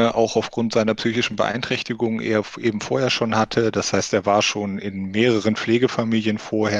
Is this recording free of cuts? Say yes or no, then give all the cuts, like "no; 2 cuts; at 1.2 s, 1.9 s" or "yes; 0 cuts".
yes; 0 cuts